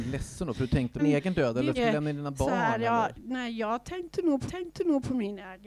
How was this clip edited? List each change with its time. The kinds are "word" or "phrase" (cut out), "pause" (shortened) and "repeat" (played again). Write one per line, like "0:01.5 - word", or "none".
0:01.0 - phrase
0:01.7 - phrase
0:04.5 - repeat